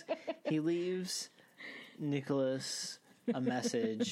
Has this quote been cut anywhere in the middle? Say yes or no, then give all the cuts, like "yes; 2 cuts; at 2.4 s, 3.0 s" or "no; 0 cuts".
no; 0 cuts